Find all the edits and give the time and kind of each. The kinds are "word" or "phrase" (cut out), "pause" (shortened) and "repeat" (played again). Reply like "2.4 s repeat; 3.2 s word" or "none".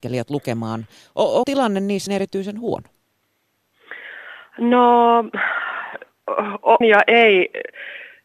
1.4 s word; 2.1 s word; 6.8 s word